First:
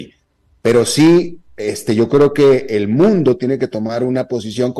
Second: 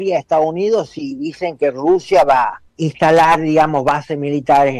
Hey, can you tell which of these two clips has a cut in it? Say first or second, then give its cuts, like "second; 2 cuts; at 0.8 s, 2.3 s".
second; 1 cut; at 2.7 s